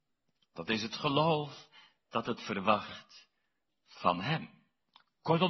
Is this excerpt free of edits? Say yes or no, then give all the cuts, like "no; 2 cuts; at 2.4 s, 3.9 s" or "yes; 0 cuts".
yes; 0 cuts